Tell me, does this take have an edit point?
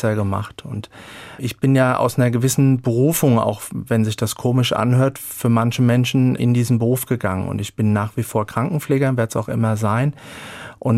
yes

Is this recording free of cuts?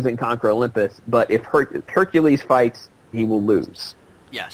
no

